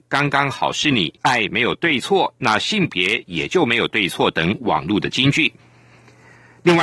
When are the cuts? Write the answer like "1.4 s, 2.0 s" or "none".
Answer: 1.2 s